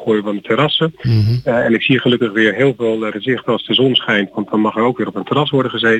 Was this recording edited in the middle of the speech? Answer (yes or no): yes